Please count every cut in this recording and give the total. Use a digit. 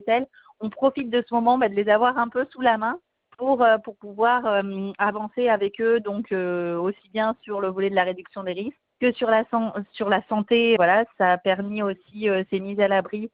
2